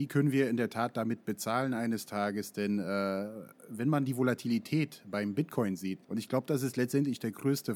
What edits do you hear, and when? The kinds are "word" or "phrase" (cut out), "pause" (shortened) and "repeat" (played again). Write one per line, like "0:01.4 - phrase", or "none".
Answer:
0:06.0 - pause